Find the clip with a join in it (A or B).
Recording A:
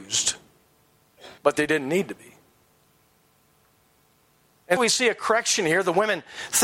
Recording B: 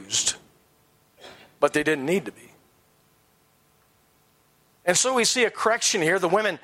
A